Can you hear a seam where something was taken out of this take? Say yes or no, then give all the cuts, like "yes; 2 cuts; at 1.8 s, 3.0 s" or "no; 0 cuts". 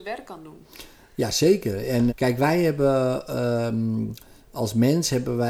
yes; 1 cut; at 2.1 s